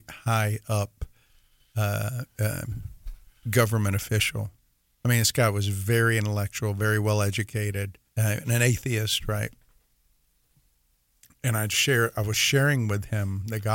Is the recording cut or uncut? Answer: cut